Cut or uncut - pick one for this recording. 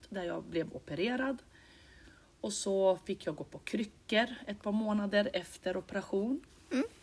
uncut